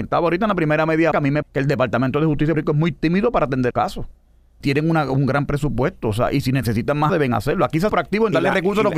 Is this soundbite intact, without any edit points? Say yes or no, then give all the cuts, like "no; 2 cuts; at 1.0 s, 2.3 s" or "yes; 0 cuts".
no; 7 cuts; at 1.1 s, 1.4 s, 2.5 s, 3.7 s, 4.6 s, 7.1 s, 7.9 s